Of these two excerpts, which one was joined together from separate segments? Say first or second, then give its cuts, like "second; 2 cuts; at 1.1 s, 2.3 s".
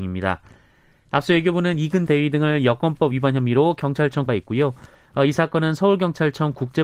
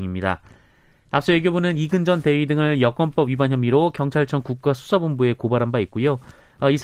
first; 2 cuts; at 2.1 s, 4.3 s